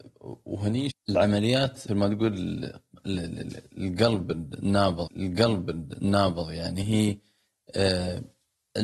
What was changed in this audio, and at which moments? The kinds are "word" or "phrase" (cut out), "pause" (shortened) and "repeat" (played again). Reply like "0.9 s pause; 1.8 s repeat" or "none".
0.9 s word; 1.9 s word; 5.1 s repeat